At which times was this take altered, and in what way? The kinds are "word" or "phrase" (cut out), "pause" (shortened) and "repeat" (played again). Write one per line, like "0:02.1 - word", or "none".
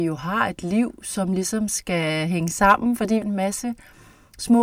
0:03.2 - word

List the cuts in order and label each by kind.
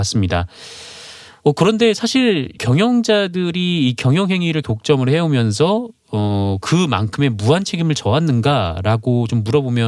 0:02.6 - word
0:04.6 - word

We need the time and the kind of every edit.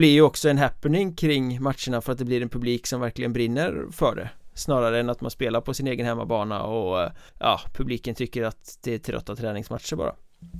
0:07.3 - pause

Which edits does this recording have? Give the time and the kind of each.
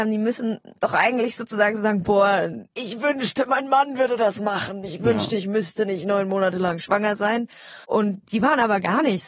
0:02.7 - pause
0:07.8 - pause

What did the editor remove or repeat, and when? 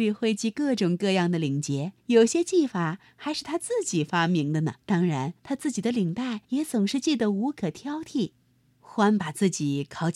0:02.0 - pause
0:04.8 - pause
0:05.4 - pause
0:06.4 - pause
0:08.5 - pause

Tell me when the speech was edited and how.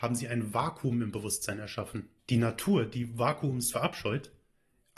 0:02.2 - pause

